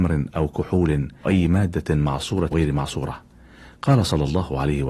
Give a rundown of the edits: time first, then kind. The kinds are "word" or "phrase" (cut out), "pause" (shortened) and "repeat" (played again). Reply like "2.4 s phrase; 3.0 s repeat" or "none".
1.2 s word; 2.5 s word